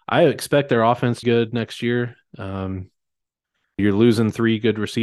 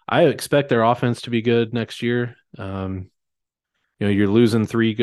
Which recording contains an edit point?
first; 2 cuts; at 1.2 s, 3.8 s

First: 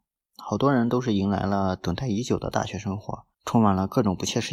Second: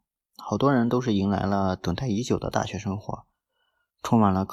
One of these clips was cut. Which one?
first; 1 cut; at 3.3 s

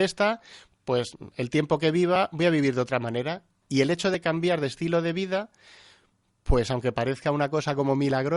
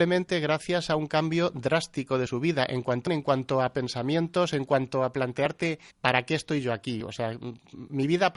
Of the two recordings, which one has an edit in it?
second; 2 cuts; at 3.1 s, 5.9 s

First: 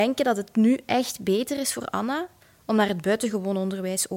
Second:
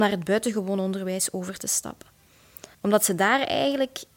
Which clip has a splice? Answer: second; 1 cut; at 2.7 s

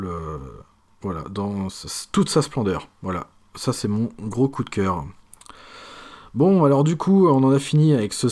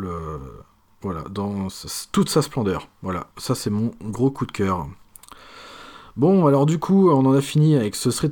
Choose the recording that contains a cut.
second; 1 cut; at 3.3 s

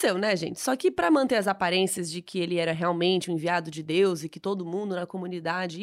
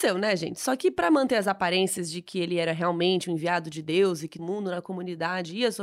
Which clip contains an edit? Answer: second; 1 cut; at 4.4 s

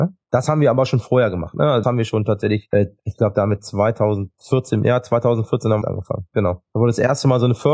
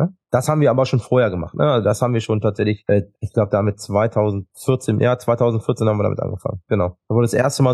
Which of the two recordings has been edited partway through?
first; 2 cuts; at 1.8 s, 5.8 s

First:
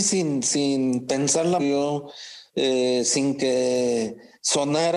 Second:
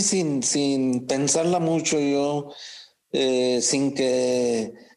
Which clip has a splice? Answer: first; 2 cuts; at 1.6 s, 2.5 s

